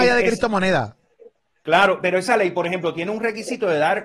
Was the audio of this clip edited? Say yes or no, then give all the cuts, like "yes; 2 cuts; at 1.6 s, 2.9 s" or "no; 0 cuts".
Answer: no; 0 cuts